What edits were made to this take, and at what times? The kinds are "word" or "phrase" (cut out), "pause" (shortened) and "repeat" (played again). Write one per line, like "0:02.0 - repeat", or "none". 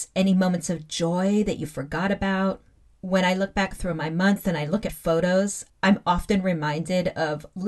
0:02.8 - pause
0:04.9 - word
0:05.7 - pause